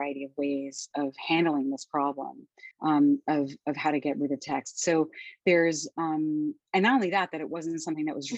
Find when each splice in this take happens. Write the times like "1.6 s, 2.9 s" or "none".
2.7 s